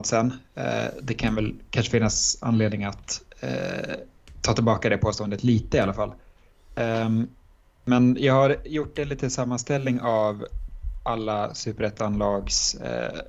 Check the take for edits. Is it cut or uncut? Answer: uncut